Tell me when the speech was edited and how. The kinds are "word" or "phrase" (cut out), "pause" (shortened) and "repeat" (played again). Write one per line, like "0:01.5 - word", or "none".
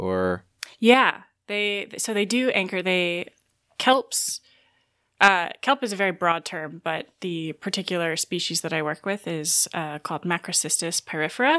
none